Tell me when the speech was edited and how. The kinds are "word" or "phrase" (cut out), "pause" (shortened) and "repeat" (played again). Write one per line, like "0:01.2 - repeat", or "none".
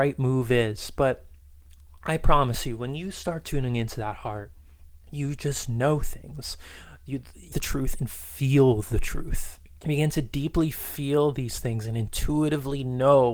0:05.0 - pause
0:07.5 - phrase
0:09.8 - pause